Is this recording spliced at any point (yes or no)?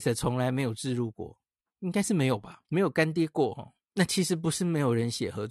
yes